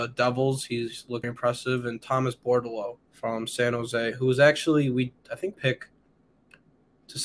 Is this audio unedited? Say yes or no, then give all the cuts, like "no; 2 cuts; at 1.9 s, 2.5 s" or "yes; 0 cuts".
no; 3 cuts; at 1.2 s, 3.0 s, 5.5 s